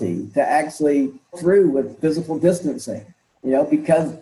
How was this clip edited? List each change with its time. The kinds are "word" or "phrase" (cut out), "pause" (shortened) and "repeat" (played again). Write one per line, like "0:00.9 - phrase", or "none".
0:01.3 - word
0:02.0 - word